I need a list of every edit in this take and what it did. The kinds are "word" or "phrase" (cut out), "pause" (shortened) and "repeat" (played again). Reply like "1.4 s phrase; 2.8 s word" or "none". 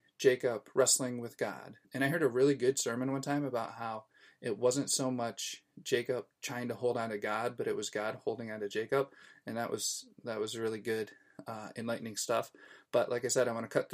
1.8 s pause; 12.8 s pause